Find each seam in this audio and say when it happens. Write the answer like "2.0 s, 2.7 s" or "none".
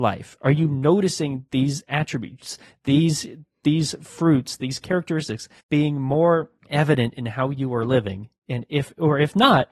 5.6 s, 6.6 s

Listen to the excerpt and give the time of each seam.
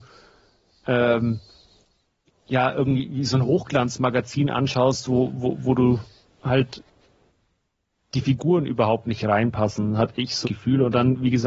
10.4 s

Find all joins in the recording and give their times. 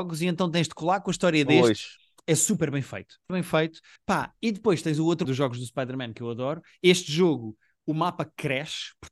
3.3 s, 4.0 s, 5.2 s

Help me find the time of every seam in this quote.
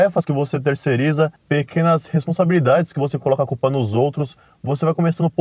1.4 s

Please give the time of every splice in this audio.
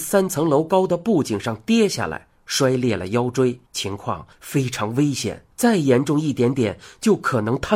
3.7 s, 4.3 s, 5.5 s

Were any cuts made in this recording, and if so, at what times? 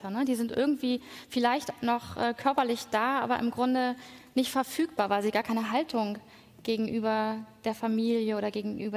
none

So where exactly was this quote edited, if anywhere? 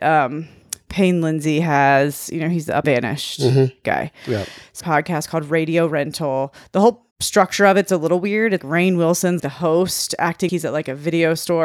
2.8 s, 4.8 s, 7.1 s, 8.6 s, 9.4 s, 10.5 s

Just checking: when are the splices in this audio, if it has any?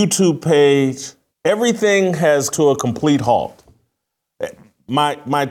1.3 s, 2.5 s

